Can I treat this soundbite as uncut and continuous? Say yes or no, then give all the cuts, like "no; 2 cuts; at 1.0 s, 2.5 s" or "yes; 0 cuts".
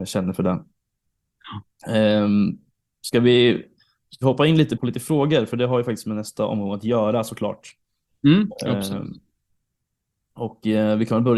no; 1 cut; at 4.8 s